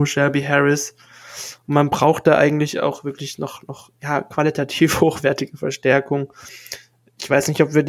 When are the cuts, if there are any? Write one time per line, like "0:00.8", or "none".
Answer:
none

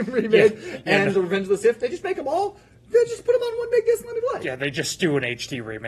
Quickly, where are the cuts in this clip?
none

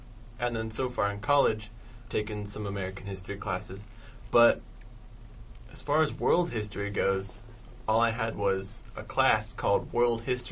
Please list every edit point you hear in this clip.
0:02.1

